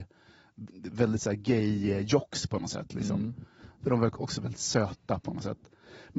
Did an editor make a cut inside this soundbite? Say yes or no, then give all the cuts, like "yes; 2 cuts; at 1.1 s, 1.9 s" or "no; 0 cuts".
no; 0 cuts